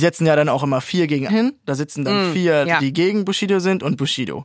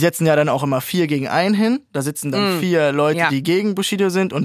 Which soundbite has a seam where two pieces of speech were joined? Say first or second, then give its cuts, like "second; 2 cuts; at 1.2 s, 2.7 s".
first; 2 cuts; at 1.3 s, 2.6 s